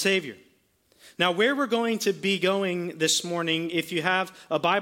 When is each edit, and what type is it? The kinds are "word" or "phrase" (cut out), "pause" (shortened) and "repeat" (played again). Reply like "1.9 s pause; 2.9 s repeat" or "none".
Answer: none